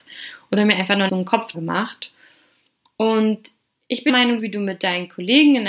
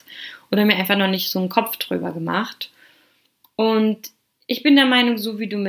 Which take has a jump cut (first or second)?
first